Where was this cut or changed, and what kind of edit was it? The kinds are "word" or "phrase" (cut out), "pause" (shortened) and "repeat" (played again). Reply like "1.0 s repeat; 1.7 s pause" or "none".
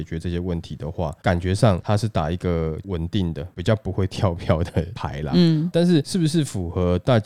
5.7 s word